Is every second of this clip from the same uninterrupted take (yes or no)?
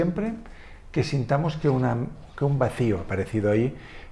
yes